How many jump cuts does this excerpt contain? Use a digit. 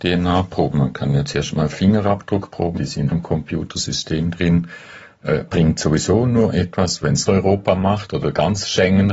3